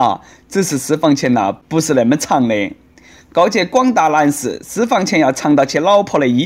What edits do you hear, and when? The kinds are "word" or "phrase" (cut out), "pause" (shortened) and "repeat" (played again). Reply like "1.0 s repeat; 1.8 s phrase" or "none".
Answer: none